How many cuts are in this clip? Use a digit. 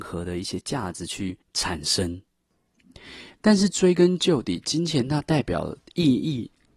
1